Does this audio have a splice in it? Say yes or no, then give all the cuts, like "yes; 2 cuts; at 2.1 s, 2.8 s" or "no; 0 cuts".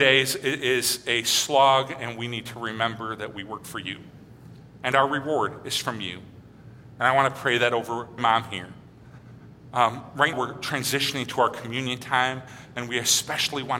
yes; 2 cuts; at 8.2 s, 10.3 s